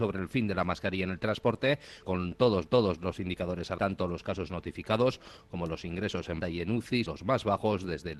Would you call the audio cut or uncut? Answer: cut